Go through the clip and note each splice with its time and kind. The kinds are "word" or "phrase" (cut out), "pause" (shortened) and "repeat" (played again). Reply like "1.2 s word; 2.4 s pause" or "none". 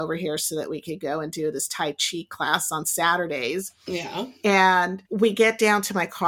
5.0 s pause

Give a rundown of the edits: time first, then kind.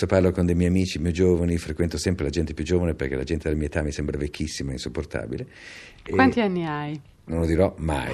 none

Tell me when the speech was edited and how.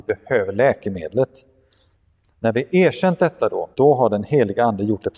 3.7 s pause

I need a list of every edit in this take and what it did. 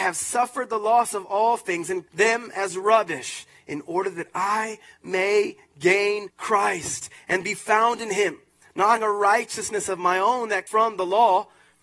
2.1 s word; 6.3 s pause; 9.0 s word; 10.7 s word

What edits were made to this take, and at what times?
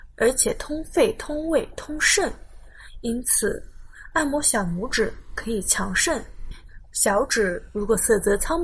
none

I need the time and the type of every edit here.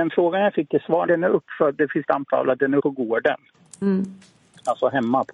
1.1 s word; 2.0 s word; 2.8 s word

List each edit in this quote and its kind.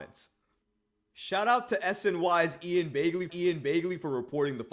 3.3 s repeat

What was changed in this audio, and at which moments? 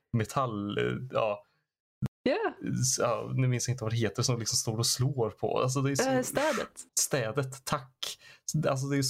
6.9 s pause

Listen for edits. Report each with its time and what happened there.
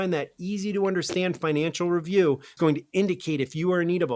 2.6 s word

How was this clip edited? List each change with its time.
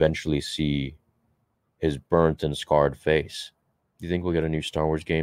2.0 s pause; 3.8 s pause

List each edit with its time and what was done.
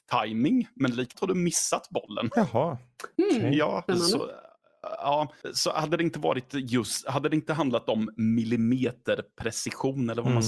1.1 s word; 3.9 s pause

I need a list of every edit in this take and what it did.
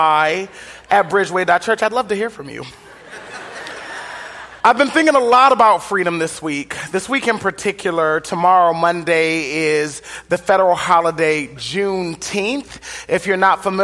4.6 s pause

